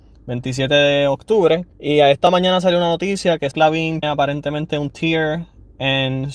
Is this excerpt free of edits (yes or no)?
no